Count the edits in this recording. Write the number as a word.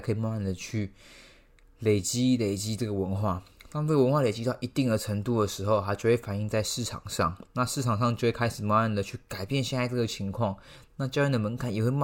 zero